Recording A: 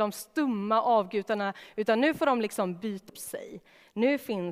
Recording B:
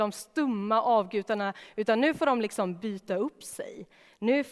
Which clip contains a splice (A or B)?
A